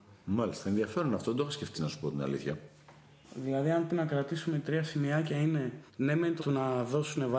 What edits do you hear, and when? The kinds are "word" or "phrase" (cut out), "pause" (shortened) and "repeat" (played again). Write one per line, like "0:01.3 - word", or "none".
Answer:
0:01.7 - word
0:03.9 - word
0:05.9 - pause
0:06.4 - word